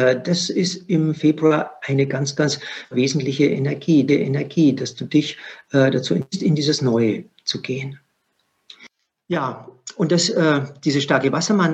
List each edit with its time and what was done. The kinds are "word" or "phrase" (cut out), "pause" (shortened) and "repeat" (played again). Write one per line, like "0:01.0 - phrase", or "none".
0:02.9 - word
0:04.1 - repeat